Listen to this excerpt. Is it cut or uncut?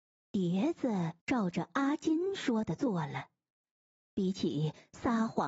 cut